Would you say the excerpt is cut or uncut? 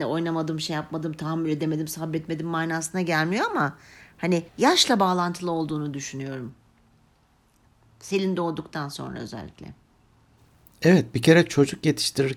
cut